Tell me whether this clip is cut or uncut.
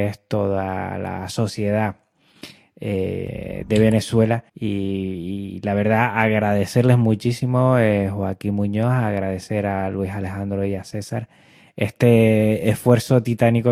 cut